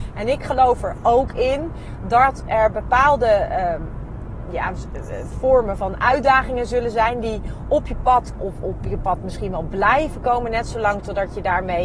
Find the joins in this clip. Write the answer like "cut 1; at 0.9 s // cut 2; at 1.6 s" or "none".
cut 1; at 5.8 s // cut 2; at 8.4 s

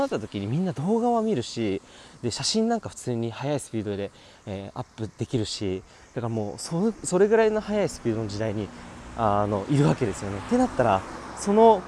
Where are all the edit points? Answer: none

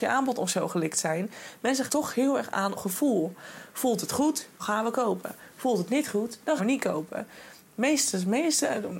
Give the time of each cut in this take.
cut 1; at 1.9 s // cut 2; at 2.7 s // cut 3; at 4.6 s // cut 4; at 6.6 s

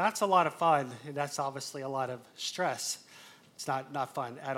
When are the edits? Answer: none

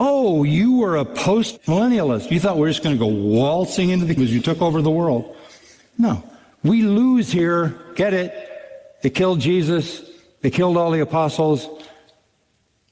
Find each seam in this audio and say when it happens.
cut 1; at 4.2 s

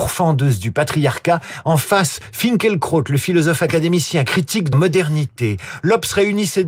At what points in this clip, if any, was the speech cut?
cut 1; at 4.7 s

